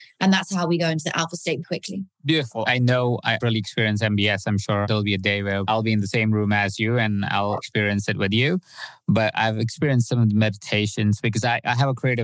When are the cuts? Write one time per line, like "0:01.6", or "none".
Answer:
0:01.6
0:03.4